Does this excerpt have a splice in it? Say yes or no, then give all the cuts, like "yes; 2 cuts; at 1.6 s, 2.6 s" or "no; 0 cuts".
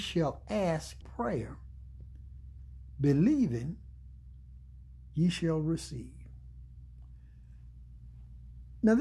yes; 1 cut; at 1.0 s